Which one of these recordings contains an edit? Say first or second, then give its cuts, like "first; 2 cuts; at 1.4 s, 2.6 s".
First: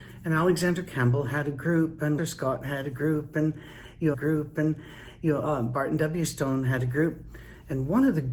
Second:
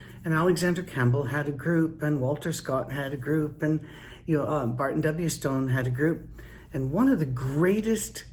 first; 2 cuts; at 2.2 s, 4.1 s